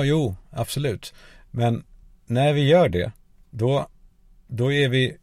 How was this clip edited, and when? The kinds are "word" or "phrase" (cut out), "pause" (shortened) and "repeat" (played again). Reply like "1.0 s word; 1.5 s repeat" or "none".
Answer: none